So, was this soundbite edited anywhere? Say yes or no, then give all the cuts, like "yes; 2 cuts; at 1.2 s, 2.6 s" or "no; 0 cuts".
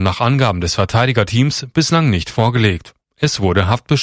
no; 0 cuts